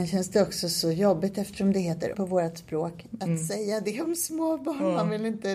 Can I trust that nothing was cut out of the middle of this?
no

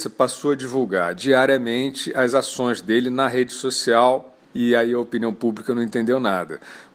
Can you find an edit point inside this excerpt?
yes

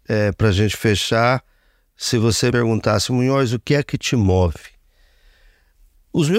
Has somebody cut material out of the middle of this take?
yes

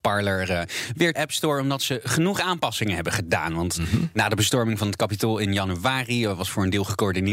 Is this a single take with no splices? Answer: no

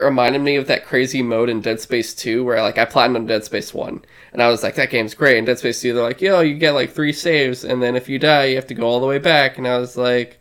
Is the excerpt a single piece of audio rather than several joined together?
yes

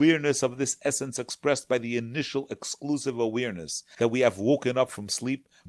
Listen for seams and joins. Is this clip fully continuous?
yes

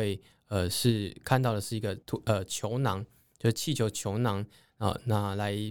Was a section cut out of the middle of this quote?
yes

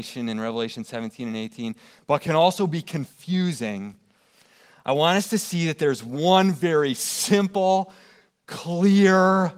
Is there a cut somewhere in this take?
no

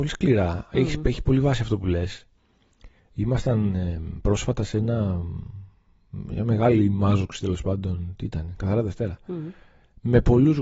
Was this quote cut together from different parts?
no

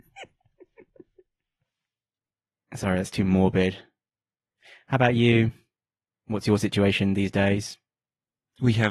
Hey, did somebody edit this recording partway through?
no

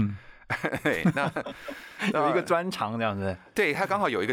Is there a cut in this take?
no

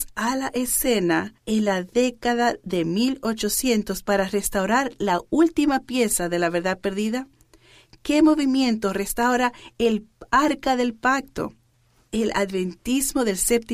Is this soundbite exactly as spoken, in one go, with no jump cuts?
no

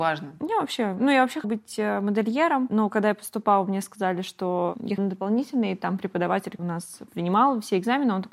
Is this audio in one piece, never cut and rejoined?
no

